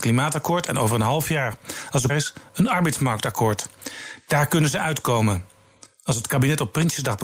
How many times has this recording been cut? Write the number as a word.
one